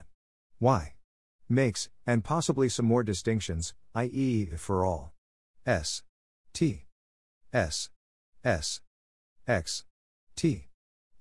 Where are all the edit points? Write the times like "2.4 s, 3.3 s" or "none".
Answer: none

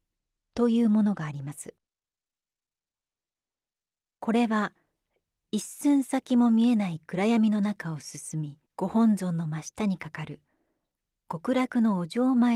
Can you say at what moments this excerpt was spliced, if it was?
8.6 s

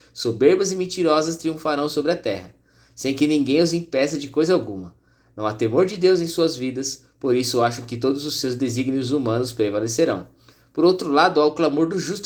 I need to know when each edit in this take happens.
none

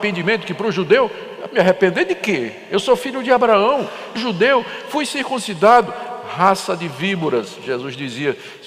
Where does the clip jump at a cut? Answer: 4.2 s

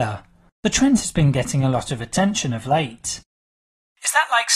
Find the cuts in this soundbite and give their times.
none

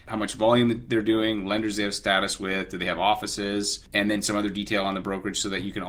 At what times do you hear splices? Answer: none

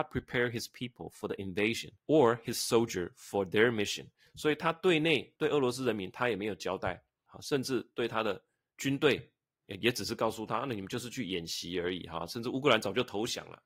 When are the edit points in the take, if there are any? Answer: none

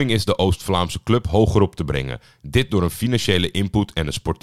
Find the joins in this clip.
none

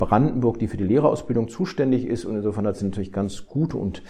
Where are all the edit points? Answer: none

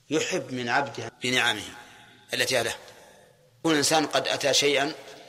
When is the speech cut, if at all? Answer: 1.1 s, 2.6 s, 3.6 s

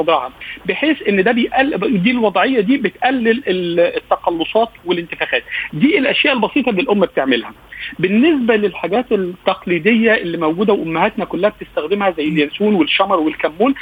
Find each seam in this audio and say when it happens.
none

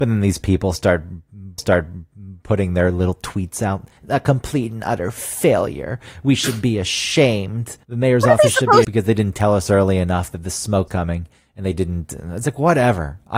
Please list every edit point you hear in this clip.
1.6 s, 4.0 s, 7.8 s, 8.8 s, 10.9 s

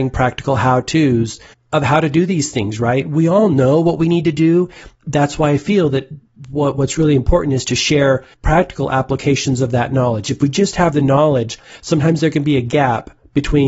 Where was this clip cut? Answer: 1.5 s, 4.9 s, 8.3 s

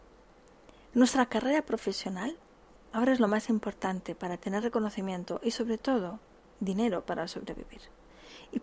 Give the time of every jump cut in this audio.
none

